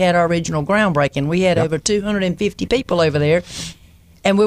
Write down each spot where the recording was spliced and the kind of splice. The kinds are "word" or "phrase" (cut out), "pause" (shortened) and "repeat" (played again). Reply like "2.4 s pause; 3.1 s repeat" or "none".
none